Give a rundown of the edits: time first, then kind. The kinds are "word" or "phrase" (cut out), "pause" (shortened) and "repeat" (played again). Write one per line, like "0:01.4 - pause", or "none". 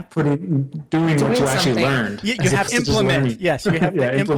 0:02.7 - word